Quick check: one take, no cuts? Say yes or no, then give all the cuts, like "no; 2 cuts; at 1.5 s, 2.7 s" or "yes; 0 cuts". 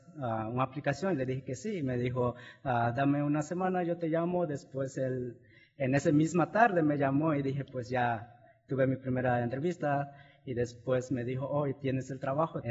yes; 0 cuts